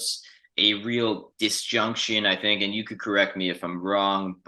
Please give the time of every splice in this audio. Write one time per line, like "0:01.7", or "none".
none